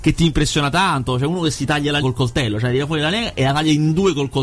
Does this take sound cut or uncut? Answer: cut